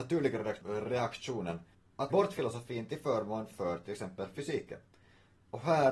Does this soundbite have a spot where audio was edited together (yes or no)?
yes